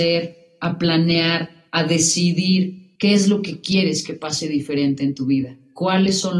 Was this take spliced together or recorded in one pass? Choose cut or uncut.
cut